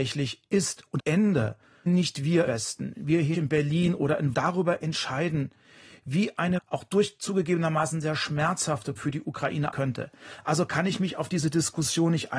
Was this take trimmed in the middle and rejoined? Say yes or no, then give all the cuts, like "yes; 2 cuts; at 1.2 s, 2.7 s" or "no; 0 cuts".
yes; 8 cuts; at 1.0 s, 1.9 s, 2.5 s, 3.3 s, 4.3 s, 6.6 s, 9.0 s, 9.7 s